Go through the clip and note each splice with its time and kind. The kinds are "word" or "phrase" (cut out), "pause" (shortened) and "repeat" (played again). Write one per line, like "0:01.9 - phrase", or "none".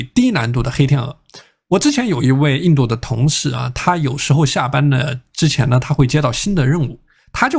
none